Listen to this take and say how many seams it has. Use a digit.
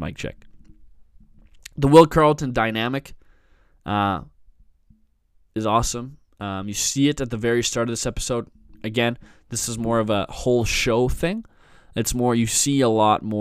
0